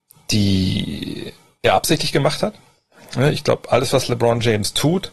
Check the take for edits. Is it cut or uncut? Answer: uncut